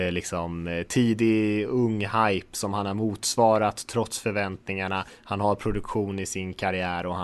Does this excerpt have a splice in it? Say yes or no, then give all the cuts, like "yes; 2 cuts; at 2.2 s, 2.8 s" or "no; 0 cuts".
no; 0 cuts